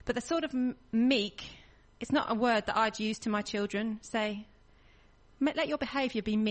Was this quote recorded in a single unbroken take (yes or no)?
yes